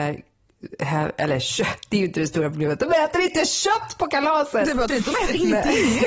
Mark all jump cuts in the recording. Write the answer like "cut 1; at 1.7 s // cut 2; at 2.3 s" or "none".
cut 1; at 4.9 s

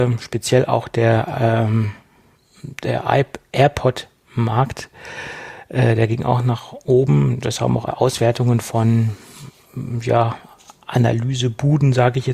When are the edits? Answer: cut 1; at 7.9 s

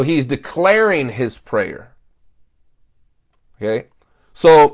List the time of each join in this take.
none

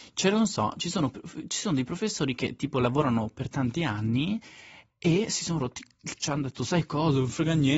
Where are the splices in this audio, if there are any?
cut 1; at 1.1 s // cut 2; at 6.2 s

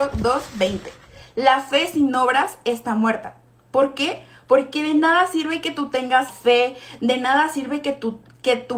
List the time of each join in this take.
cut 1; at 6.3 s

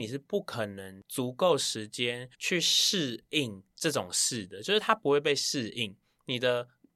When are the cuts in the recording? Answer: cut 1; at 2.3 s

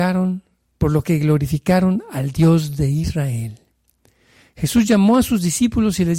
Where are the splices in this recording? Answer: none

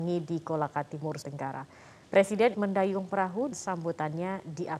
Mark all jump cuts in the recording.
cut 1; at 1.2 s // cut 2; at 2.5 s // cut 3; at 3.5 s

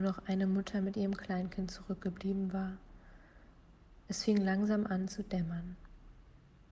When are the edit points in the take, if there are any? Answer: none

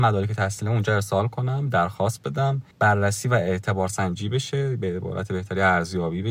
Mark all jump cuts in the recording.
cut 1; at 2.7 s

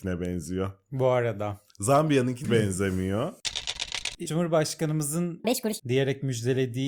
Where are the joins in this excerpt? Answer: cut 1; at 2.4 s // cut 2; at 4.3 s // cut 3; at 5.4 s // cut 4; at 5.8 s

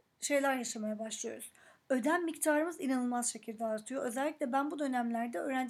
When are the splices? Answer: none

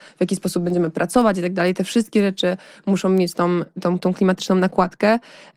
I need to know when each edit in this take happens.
none

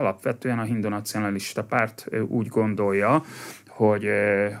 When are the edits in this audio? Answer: none

